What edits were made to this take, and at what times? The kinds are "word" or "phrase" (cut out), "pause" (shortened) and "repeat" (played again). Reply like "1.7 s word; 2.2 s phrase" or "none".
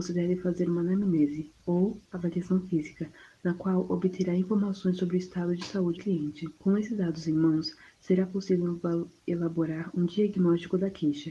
1.6 s pause; 6.0 s word; 6.6 s pause

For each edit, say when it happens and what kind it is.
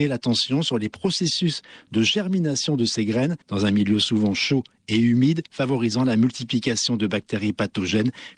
3.4 s pause; 5.5 s pause

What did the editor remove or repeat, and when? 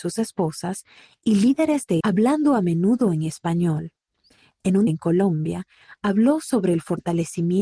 2.0 s word; 4.9 s word

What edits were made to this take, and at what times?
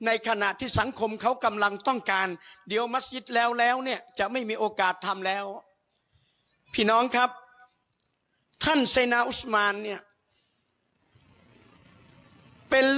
none

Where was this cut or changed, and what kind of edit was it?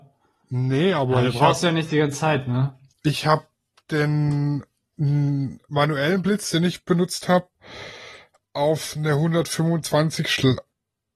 none

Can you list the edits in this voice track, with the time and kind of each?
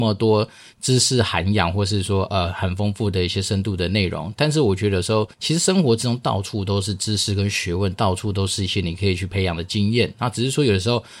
5.3 s pause

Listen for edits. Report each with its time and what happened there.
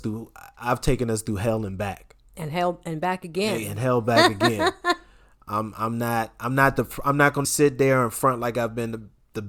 2.3 s pause; 7.4 s word

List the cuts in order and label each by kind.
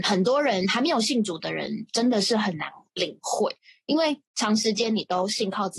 4.2 s pause

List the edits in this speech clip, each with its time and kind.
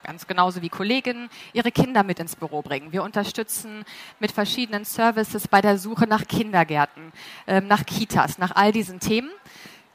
none

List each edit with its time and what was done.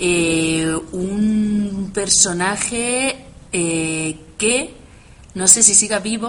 3.5 s pause

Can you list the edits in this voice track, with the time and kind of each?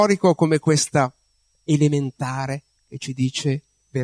2.8 s word

